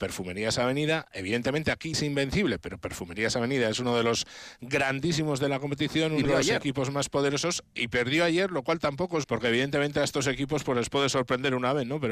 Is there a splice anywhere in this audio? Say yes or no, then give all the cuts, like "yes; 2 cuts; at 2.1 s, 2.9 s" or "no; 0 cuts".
yes; 3 cuts; at 1.9 s, 6.2 s, 9.2 s